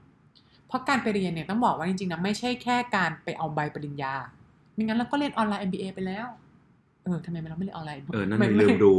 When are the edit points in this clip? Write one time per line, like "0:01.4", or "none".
0:06.8
0:08.1